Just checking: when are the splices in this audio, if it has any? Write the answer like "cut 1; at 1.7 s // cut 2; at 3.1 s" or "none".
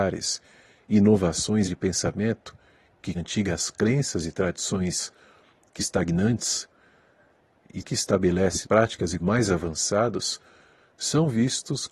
cut 1; at 1.6 s // cut 2; at 3.1 s // cut 3; at 5.8 s // cut 4; at 7.8 s // cut 5; at 8.6 s // cut 6; at 9.2 s